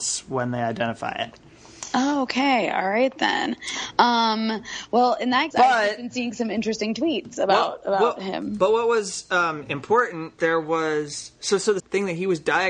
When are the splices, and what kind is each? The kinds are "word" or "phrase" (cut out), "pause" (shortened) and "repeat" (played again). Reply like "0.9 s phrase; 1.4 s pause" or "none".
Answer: 5.5 s word; 10.4 s phrase; 11.8 s word